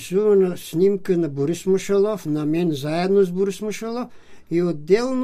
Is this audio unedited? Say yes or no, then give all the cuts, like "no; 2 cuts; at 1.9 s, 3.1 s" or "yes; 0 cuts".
yes; 0 cuts